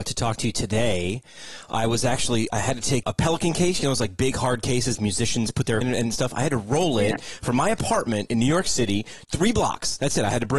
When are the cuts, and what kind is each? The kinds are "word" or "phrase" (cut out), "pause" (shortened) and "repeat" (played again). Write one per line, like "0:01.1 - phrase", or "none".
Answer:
0:02.5 - word
0:03.0 - word
0:04.9 - word
0:05.8 - word